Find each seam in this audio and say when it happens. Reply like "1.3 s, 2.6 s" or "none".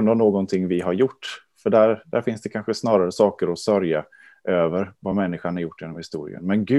none